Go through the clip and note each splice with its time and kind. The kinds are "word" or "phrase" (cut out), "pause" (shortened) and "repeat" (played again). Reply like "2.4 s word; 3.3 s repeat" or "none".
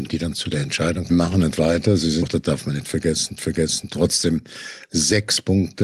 1.1 s phrase; 2.2 s word; 3.4 s repeat